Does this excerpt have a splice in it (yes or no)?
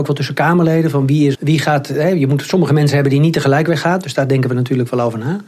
yes